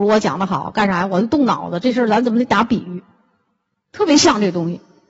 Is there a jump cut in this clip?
no; 0 cuts

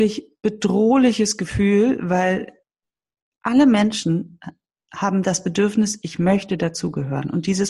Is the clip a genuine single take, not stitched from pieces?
yes; 0 cuts

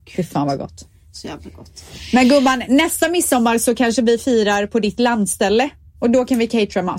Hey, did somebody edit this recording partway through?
no; 0 cuts

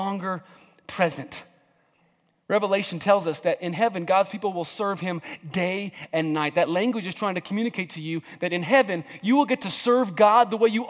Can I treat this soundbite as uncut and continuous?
yes; 0 cuts

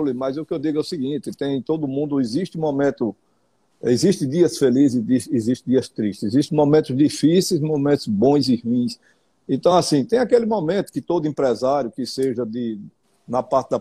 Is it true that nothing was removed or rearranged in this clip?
yes; 0 cuts

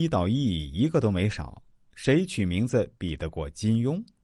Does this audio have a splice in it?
no; 0 cuts

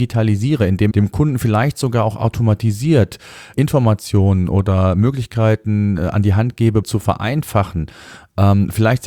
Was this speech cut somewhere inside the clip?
yes; 3 cuts; at 0.9 s, 3.5 s, 6.8 s

